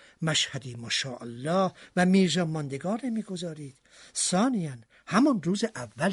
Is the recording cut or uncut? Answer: uncut